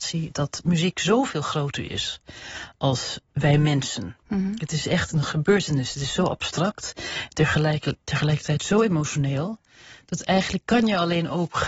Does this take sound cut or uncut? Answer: cut